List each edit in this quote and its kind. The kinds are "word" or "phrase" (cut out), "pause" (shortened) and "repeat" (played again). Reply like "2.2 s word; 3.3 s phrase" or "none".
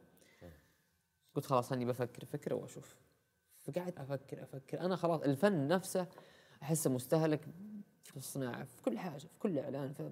4.0 s word; 8.1 s phrase